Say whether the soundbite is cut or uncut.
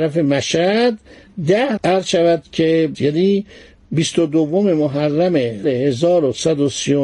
cut